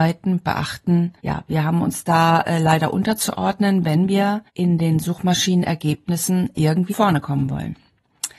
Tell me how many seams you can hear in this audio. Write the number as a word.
three